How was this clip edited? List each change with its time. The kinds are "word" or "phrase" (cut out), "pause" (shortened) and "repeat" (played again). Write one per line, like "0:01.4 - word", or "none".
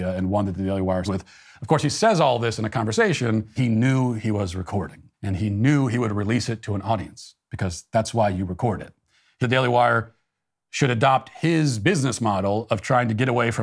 0:01.0 - phrase
0:03.6 - word
0:05.1 - pause
0:09.4 - phrase